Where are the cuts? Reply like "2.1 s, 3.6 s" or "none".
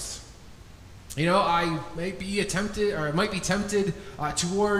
1.9 s

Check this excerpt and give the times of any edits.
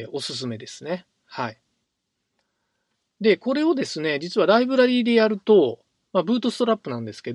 none

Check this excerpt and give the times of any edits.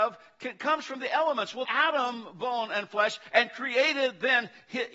1.6 s

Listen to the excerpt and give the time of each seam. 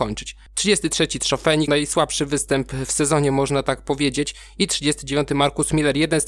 1.7 s

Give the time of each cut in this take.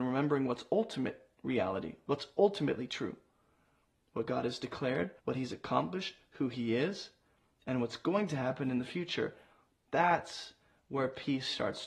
5.2 s

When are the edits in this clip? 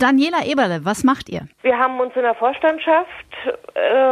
1.5 s

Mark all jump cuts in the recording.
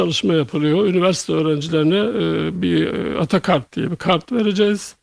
none

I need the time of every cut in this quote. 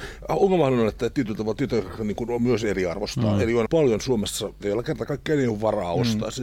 3.7 s, 4.6 s

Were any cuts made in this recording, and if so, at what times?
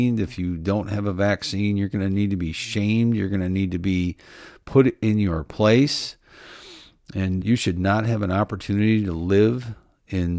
7.4 s

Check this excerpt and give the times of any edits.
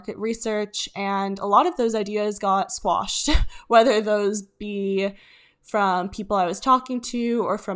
none

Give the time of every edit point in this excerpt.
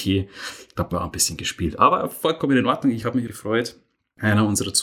0.9 s, 3.3 s

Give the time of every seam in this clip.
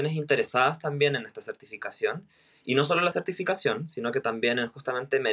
none

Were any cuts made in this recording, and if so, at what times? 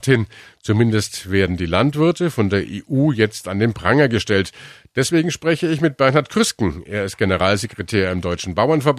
none

